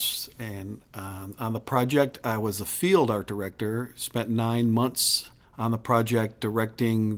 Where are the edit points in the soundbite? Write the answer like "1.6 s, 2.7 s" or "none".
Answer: 5.4 s